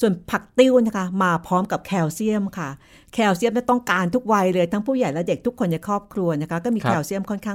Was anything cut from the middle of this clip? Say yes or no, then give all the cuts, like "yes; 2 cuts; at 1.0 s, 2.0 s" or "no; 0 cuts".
no; 0 cuts